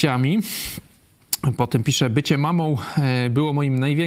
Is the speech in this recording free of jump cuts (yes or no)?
yes